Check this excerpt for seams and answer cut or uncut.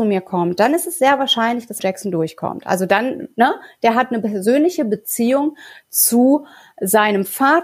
cut